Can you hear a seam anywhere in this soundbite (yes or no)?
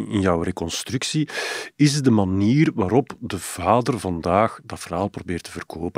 no